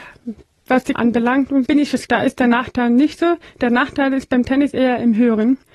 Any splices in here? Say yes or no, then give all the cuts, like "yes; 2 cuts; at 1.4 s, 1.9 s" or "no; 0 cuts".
yes; 3 cuts; at 0.9 s, 1.7 s, 2.1 s